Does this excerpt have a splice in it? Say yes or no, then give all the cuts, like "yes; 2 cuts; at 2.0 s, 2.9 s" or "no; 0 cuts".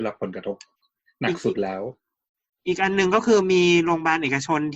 no; 0 cuts